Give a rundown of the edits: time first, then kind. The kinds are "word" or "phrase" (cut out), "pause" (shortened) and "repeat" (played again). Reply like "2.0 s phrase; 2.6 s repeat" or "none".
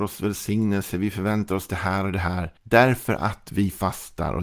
2.6 s pause